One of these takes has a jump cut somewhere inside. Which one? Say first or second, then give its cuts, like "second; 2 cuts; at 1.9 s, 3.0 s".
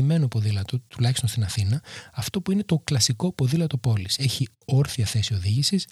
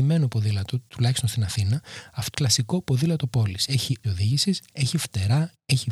second; 2 cuts; at 2.3 s, 4.0 s